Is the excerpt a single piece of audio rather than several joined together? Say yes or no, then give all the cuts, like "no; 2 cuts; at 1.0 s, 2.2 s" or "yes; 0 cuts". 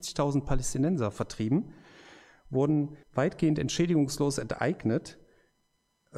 no; 1 cut; at 3.0 s